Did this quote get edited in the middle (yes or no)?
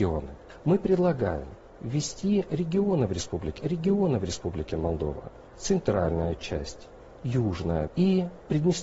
yes